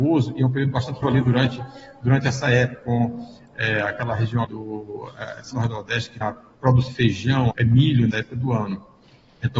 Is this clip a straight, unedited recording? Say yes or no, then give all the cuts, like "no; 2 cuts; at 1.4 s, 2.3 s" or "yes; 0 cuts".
no; 8 cuts; at 1.0 s, 2.7 s, 4.4 s, 5.5 s, 6.2 s, 6.9 s, 7.5 s, 8.1 s